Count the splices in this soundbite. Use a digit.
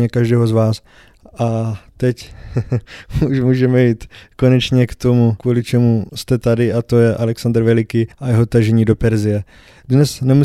1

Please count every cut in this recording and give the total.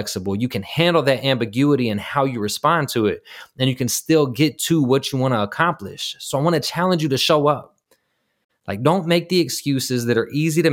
0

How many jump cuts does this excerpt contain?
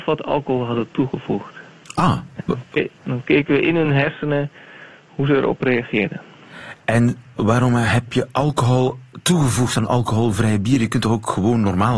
0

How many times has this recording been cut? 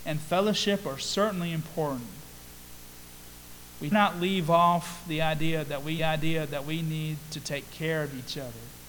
2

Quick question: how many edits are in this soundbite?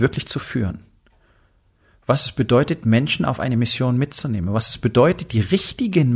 0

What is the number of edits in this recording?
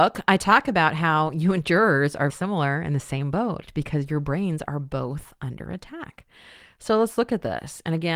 1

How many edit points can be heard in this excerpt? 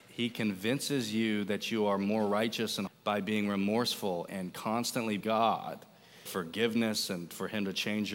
4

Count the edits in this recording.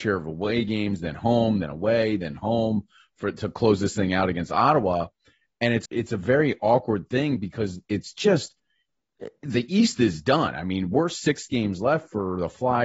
1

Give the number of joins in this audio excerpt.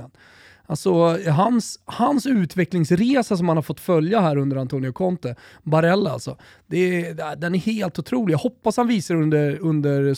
0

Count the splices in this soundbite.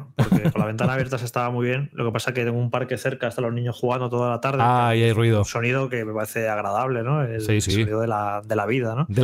0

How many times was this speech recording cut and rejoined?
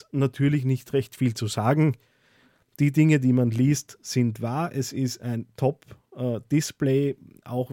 0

